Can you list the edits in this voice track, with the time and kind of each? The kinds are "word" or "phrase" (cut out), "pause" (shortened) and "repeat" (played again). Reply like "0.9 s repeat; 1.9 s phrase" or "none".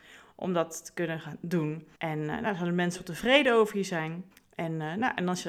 1.9 s pause; 2.9 s word; 4.3 s pause